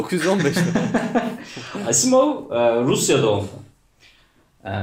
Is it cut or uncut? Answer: uncut